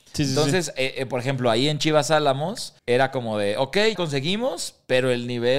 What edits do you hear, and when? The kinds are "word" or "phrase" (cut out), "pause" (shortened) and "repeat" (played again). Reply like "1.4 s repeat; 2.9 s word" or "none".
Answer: 2.8 s pause; 4.0 s word